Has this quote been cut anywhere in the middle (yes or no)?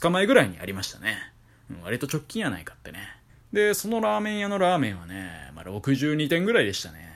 yes